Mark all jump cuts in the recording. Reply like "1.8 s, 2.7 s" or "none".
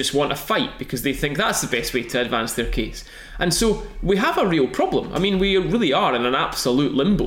none

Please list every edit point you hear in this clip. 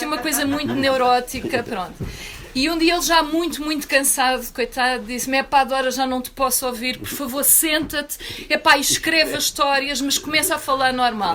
none

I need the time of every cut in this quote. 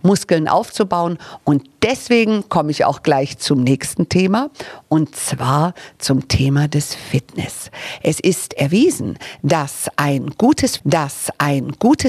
10.8 s

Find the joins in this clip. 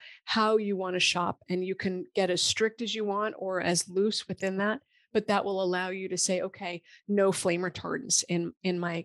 none

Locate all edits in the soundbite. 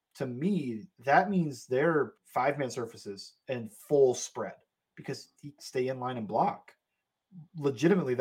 0.9 s, 2.2 s, 5.6 s

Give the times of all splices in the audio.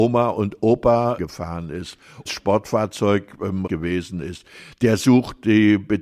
1.2 s, 2.3 s, 3.7 s

